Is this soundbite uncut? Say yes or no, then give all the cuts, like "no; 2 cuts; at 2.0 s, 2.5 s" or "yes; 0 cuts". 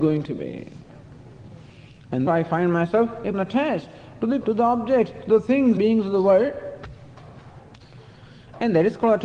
no; 4 cuts; at 2.3 s, 3.3 s, 4.4 s, 5.8 s